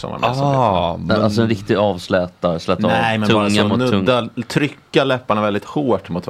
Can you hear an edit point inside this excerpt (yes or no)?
no